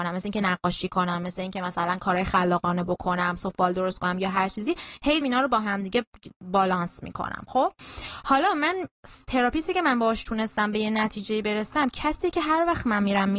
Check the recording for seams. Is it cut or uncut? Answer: cut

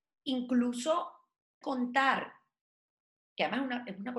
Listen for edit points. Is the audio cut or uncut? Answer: cut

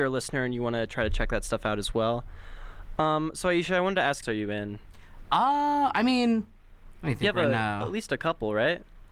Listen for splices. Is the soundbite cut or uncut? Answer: cut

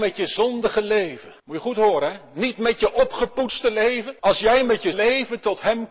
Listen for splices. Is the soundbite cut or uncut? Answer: cut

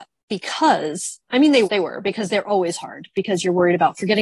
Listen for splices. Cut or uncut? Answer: cut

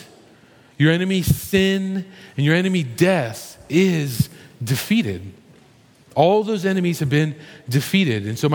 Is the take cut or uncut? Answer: uncut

